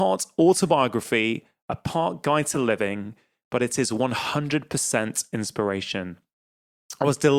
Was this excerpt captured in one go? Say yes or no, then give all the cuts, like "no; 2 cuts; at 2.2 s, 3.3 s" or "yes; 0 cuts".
yes; 0 cuts